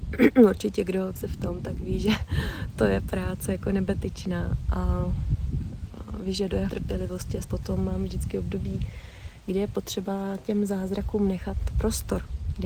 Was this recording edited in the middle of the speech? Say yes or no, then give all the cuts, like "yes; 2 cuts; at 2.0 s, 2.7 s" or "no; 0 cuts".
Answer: yes; 3 cuts; at 1.2 s, 6.7 s, 7.4 s